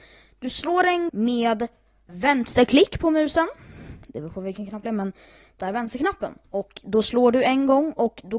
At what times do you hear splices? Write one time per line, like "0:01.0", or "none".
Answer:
0:01.1
0:02.1
0:04.9
0:05.6
0:06.4